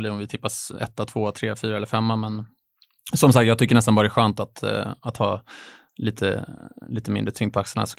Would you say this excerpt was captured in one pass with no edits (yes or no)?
yes